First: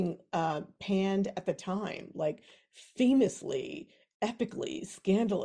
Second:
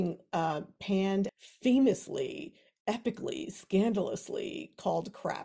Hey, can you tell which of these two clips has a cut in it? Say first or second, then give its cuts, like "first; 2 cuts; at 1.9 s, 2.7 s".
second; 1 cut; at 1.3 s